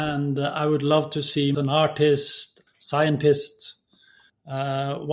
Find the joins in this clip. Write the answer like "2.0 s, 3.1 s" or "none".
1.5 s, 2.7 s